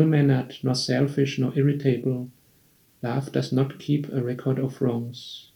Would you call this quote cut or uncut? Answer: uncut